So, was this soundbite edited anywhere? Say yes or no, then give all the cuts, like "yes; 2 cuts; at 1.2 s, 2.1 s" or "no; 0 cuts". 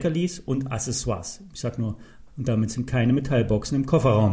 yes; 1 cut; at 2.3 s